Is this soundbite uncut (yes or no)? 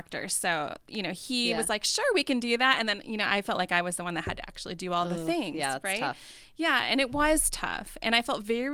yes